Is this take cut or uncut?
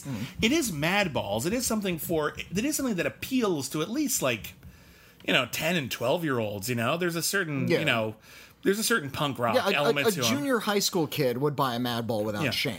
uncut